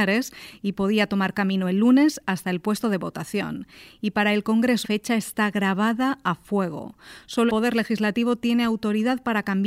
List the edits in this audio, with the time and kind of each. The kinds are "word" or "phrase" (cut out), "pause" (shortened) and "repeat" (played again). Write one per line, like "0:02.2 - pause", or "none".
0:04.8 - word
0:07.5 - word